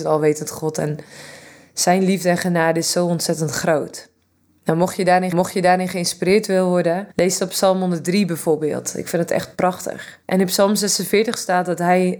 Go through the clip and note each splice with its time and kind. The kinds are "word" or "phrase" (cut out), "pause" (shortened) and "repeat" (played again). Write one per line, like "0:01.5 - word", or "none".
0:05.3 - repeat
0:07.1 - pause
0:10.2 - pause